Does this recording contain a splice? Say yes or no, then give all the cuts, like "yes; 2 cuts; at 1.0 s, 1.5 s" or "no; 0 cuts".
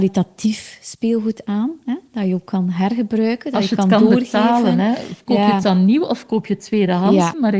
no; 0 cuts